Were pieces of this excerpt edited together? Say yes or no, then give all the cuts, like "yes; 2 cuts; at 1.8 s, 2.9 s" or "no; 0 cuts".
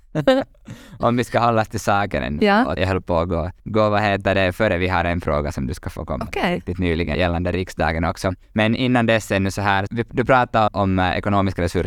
yes; 6 cuts; at 2.8 s, 3.6 s, 7.1 s, 8.4 s, 9.9 s, 10.7 s